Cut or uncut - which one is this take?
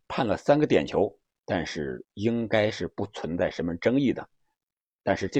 uncut